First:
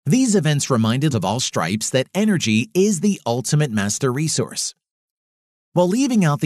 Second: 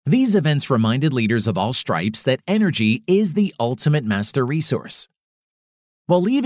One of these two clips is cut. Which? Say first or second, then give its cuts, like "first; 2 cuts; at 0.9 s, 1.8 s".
first; 1 cut; at 1.1 s